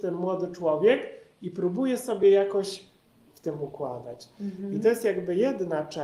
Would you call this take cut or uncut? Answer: uncut